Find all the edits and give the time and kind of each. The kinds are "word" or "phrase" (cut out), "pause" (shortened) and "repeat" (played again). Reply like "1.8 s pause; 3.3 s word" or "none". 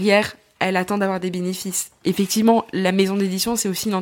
none